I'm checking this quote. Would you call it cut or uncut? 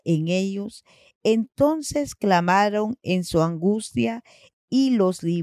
uncut